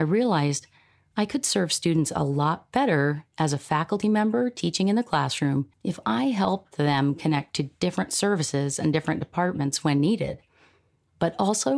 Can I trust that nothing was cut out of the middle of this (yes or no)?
no